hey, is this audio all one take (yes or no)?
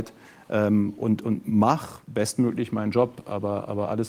yes